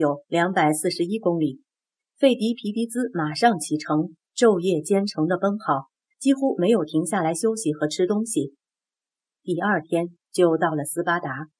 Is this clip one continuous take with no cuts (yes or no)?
yes